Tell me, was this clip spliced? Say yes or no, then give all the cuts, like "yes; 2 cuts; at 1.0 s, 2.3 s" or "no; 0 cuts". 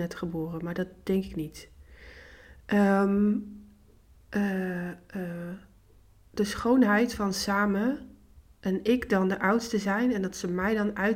no; 0 cuts